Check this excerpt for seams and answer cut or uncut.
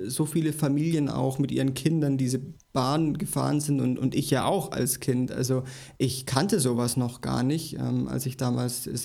uncut